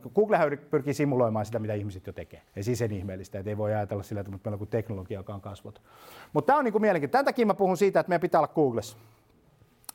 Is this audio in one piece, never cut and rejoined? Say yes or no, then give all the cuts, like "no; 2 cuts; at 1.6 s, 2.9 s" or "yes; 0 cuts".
no; 1 cut; at 2.5 s